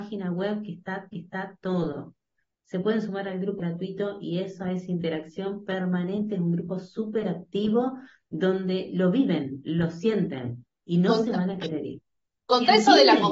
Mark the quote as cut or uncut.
cut